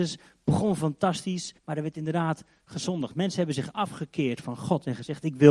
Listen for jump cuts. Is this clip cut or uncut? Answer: cut